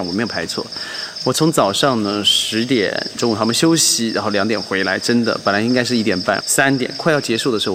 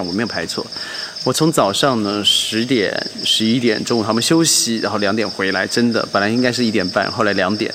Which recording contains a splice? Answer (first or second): first